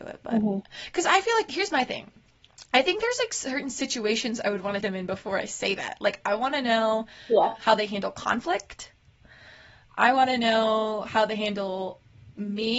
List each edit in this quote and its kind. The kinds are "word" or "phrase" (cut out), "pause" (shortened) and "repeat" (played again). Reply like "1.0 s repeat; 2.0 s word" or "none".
4.8 s word